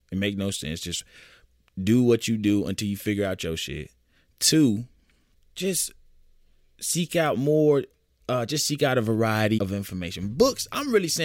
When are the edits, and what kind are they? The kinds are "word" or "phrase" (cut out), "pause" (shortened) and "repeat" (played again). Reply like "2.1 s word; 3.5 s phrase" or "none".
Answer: 9.6 s word